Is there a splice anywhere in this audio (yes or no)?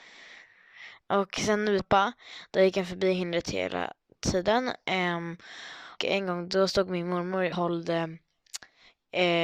yes